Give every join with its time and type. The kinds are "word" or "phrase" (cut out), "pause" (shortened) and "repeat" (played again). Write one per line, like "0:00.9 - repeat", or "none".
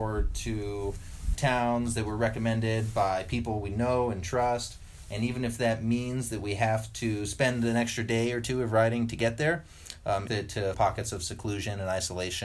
0:01.3 - word
0:10.3 - phrase
0:10.7 - phrase